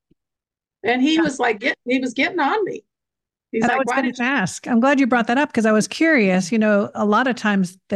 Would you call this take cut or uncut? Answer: uncut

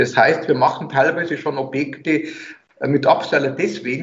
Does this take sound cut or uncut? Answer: uncut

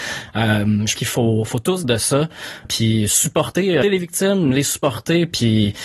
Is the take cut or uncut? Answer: cut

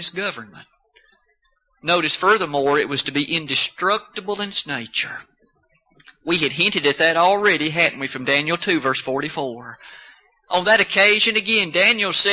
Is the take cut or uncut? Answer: uncut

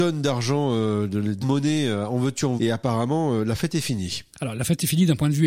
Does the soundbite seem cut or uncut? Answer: cut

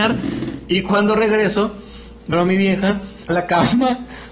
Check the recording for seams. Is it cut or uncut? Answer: cut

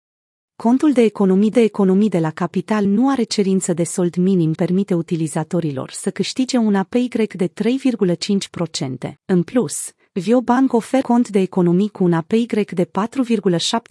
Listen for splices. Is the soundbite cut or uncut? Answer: cut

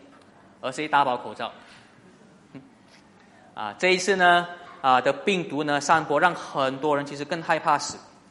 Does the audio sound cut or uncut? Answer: uncut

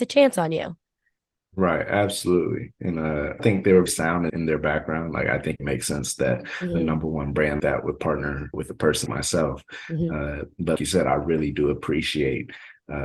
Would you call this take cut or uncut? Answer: cut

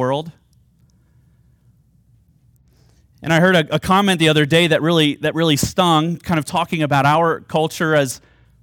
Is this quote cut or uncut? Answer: uncut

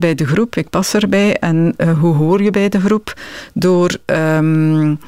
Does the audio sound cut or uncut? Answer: uncut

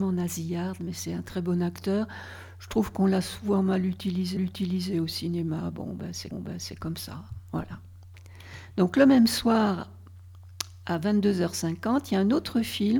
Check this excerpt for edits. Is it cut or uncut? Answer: cut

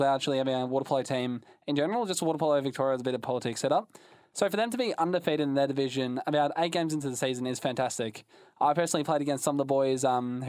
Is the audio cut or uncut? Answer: uncut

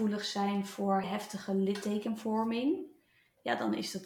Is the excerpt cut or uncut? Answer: cut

